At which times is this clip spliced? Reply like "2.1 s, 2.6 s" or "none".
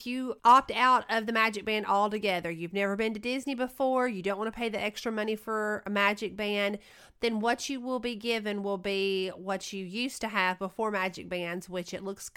none

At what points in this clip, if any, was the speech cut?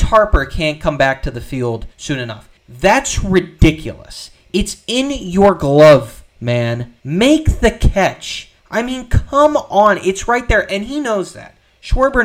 1.9 s, 2.6 s, 7.0 s, 8.6 s

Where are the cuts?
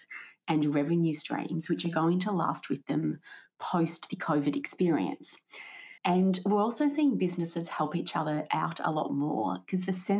6.0 s

